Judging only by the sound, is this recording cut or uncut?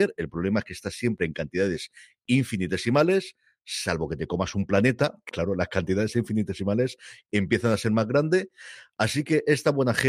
cut